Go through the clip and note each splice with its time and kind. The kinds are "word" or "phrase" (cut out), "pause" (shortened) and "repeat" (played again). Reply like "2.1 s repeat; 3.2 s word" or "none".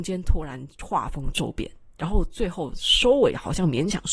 none